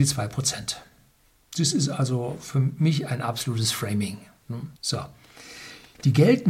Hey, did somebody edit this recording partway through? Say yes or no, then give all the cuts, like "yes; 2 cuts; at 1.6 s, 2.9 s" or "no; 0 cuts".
yes; 1 cut; at 4.8 s